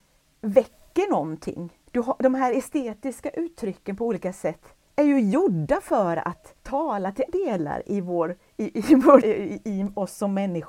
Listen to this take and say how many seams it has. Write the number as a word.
five